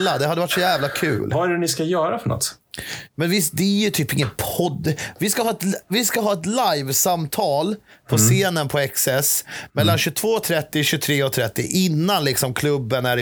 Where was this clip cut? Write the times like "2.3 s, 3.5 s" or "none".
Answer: none